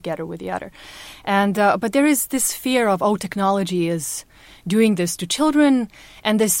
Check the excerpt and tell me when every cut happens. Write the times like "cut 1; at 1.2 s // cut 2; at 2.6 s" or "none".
none